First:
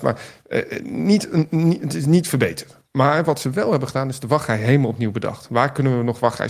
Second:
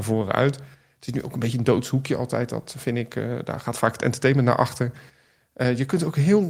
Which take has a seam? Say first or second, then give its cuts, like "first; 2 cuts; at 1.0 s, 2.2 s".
first; 1 cut; at 2.8 s